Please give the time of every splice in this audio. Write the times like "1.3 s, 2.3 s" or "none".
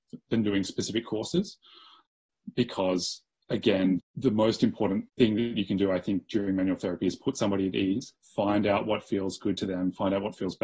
3.3 s, 5.1 s, 8.2 s

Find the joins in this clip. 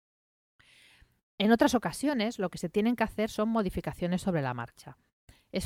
none

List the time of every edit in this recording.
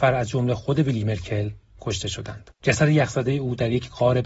2.6 s

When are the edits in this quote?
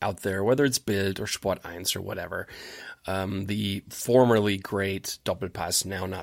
none

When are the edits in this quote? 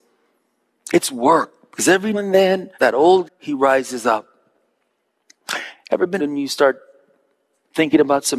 2.1 s, 2.7 s, 3.2 s, 6.2 s

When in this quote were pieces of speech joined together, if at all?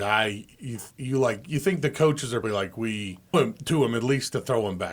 0.9 s, 2.4 s, 3.3 s

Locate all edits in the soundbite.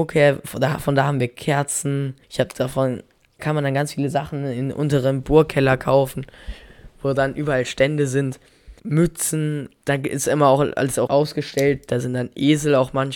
2.2 s, 3.4 s, 8.8 s, 11.1 s

